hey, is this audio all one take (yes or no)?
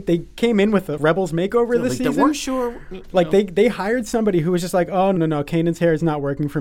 no